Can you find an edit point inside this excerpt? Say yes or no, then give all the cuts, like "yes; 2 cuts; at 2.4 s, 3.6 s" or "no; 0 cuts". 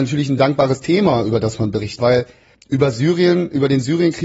yes; 1 cut; at 2.0 s